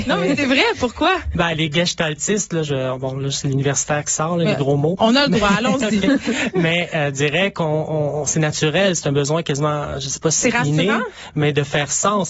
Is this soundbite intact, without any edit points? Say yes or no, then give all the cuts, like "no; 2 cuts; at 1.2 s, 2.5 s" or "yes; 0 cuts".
yes; 0 cuts